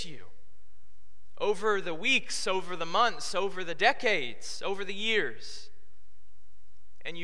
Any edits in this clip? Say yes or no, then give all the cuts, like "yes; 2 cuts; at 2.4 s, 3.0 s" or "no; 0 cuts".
no; 0 cuts